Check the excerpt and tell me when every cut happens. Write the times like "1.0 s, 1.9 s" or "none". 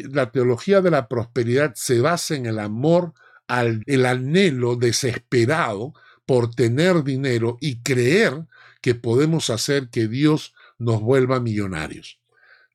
3.8 s